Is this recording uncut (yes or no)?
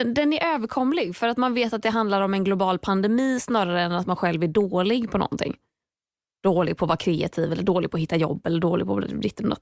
yes